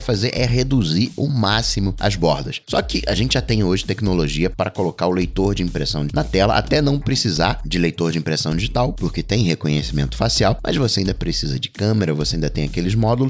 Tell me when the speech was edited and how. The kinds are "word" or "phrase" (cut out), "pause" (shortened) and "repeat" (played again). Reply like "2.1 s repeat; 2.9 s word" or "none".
6.1 s word